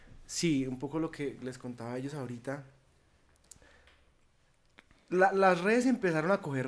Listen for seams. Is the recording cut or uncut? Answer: uncut